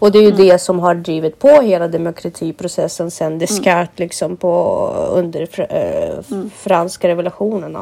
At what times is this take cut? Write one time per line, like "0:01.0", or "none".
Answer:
none

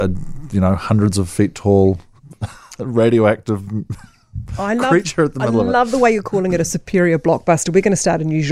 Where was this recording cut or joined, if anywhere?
0:02.2

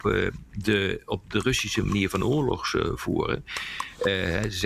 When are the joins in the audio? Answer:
none

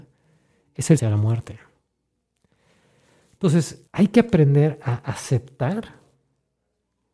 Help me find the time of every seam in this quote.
0:01.0
0:03.9

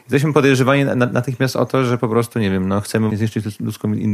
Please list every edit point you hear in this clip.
0:03.1

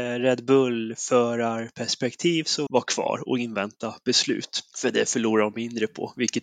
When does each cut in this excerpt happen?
0:02.7
0:04.7

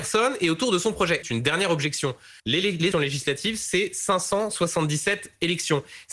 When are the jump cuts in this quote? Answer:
0:01.2
0:02.4
0:02.9

